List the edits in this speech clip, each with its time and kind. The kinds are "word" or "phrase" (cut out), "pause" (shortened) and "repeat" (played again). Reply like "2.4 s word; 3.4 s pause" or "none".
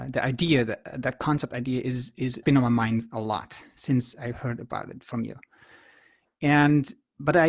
2.4 s word